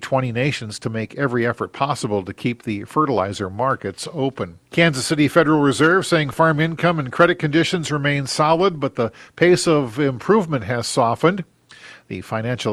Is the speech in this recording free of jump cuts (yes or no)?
no